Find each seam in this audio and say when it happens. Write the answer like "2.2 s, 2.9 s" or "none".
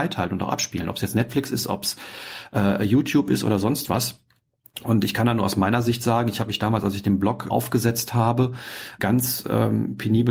7.5 s, 9.0 s